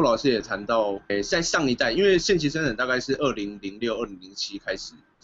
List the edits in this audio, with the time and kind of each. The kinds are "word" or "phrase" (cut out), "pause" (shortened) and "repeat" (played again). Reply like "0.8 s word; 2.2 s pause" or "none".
1.1 s word